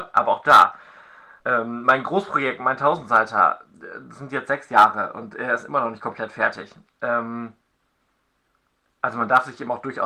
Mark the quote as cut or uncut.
cut